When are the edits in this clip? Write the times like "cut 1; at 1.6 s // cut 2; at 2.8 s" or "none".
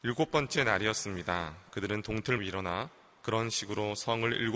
cut 1; at 2.4 s